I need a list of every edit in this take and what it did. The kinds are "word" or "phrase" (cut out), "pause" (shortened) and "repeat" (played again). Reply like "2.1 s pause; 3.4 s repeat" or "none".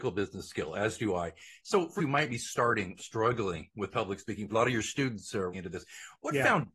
2.0 s word; 3.0 s word; 4.5 s word; 5.5 s word